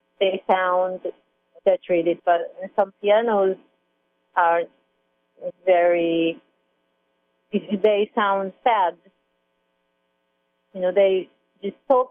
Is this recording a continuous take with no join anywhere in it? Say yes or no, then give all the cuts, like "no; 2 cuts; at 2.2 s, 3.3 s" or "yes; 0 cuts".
no; 3 cuts; at 1.6 s, 2.2 s, 5.5 s